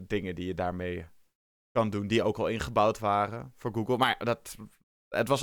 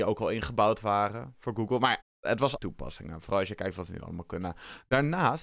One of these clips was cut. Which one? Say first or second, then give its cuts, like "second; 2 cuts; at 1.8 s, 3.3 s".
second; 2 cuts; at 2.0 s, 2.6 s